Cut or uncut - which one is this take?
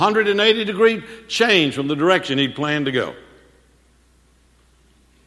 uncut